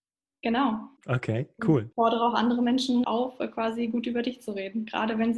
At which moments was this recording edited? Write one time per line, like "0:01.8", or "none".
0:01.0
0:01.9
0:03.0